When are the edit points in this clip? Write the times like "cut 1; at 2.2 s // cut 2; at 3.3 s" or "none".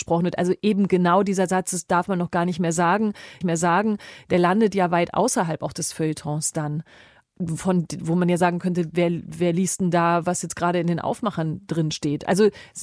cut 1; at 3.4 s